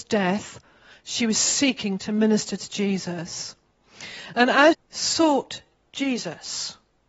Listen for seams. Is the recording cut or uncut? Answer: cut